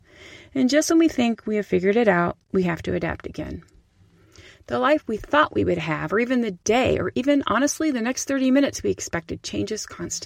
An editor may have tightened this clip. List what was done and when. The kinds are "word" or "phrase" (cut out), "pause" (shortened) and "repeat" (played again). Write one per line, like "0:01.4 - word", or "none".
none